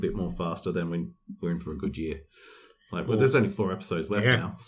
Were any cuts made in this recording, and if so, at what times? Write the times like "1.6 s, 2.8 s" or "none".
none